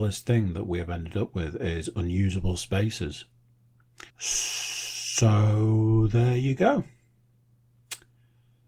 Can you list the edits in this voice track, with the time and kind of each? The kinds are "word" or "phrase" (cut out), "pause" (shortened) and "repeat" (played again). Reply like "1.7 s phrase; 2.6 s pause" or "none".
4.1 s pause

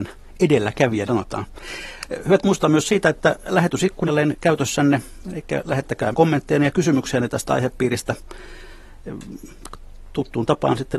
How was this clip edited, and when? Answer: 1.1 s word; 2.4 s word; 4.1 s word; 6.1 s word

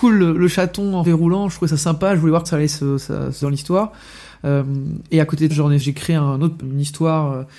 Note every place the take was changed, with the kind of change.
1.0 s word; 2.4 s word; 3.4 s word; 5.5 s word; 5.8 s word; 6.6 s word

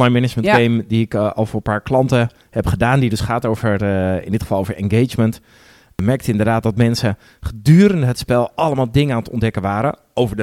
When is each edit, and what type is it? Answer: none

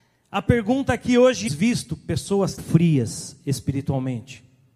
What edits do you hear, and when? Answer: 1.5 s phrase; 2.6 s word

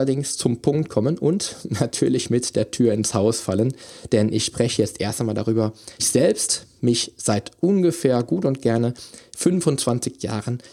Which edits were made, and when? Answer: 6.0 s word

